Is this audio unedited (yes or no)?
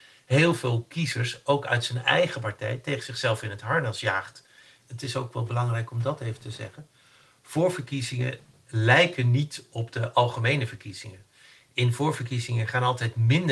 yes